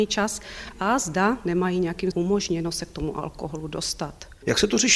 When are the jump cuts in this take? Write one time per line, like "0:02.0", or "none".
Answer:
0:02.1